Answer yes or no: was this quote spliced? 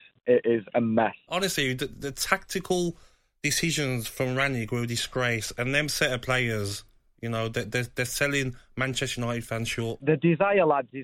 no